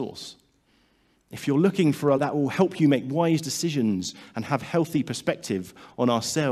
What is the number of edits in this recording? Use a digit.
1